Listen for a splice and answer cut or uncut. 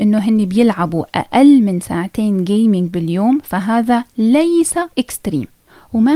cut